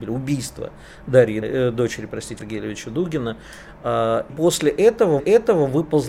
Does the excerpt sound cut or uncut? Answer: cut